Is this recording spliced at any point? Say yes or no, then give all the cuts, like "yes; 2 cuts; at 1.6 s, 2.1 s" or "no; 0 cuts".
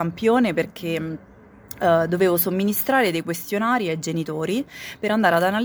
no; 0 cuts